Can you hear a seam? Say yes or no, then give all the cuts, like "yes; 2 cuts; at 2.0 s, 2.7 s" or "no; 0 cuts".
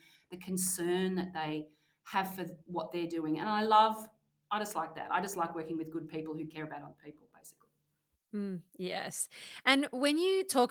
no; 0 cuts